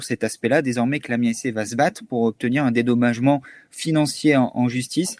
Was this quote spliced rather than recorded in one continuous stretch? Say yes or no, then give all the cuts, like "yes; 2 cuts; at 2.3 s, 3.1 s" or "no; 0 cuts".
no; 0 cuts